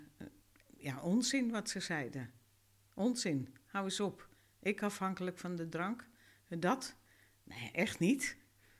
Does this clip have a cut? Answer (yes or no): no